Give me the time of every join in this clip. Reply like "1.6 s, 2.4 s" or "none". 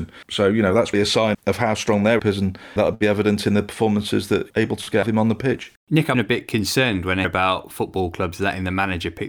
0.9 s, 1.3 s, 2.2 s, 2.8 s, 4.5 s, 5.0 s, 6.1 s, 7.2 s

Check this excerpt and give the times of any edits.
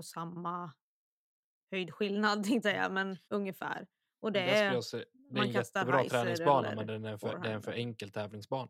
2.6 s, 3.2 s

